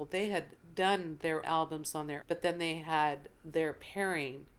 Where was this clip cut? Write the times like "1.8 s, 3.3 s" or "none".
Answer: 1.4 s, 2.2 s